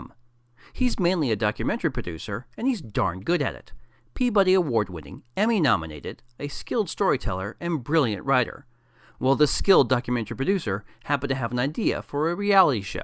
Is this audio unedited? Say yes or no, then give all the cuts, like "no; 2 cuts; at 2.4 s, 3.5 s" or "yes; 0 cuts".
yes; 0 cuts